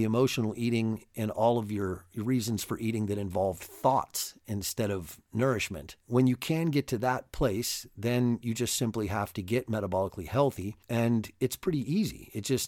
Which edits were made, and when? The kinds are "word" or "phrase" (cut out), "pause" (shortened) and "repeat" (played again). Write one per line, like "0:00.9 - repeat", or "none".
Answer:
0:06.0 - pause
0:10.8 - pause